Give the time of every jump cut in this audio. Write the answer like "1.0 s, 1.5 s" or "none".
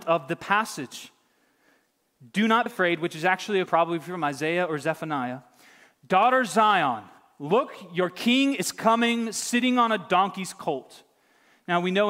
2.7 s, 3.7 s